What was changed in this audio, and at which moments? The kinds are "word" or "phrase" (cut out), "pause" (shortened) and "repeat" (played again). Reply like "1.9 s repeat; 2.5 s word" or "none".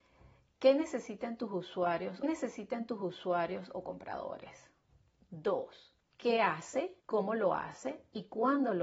2.2 s repeat; 6.0 s pause; 7.0 s pause

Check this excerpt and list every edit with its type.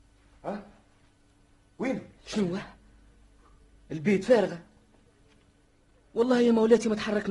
2.2 s pause

